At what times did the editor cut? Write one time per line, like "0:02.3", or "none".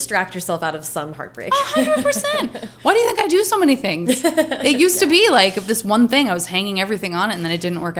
none